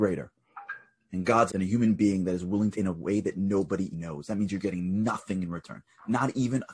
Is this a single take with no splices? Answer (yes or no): no